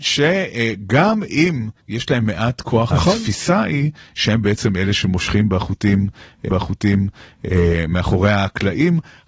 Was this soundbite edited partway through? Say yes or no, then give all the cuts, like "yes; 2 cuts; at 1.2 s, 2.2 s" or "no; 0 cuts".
yes; 3 cuts; at 1.8 s, 2.9 s, 6.5 s